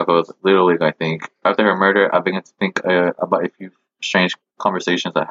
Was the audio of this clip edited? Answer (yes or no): no